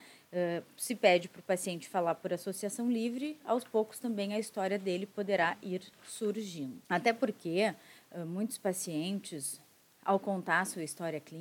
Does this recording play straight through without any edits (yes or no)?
yes